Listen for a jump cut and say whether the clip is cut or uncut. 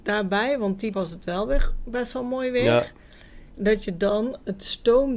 cut